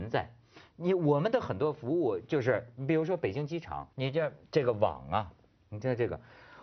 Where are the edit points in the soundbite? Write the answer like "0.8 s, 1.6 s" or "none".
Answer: 3.9 s